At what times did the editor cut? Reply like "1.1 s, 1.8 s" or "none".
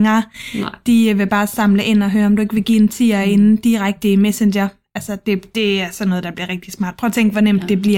none

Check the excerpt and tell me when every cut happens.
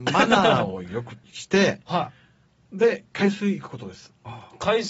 1.2 s, 2.2 s

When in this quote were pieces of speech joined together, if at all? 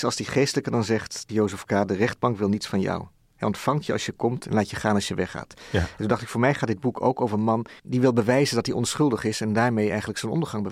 1.3 s, 7.8 s

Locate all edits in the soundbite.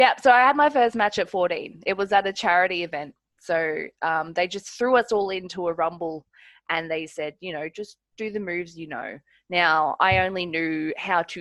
none

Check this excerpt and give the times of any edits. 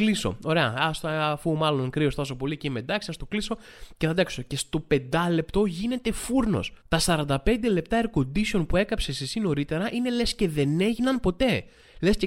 6.8 s

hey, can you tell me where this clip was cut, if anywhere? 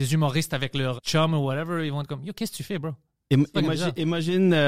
1.0 s

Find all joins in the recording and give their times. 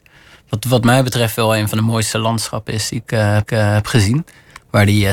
3.4 s

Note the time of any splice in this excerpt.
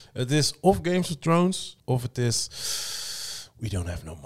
1.8 s

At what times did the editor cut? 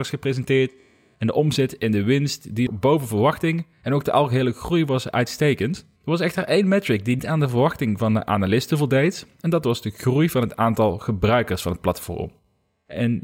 2.7 s, 3.7 s, 6.0 s, 7.2 s

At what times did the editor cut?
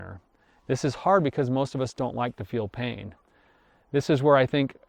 none

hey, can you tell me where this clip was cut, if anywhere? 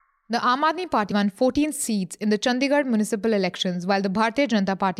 1.1 s

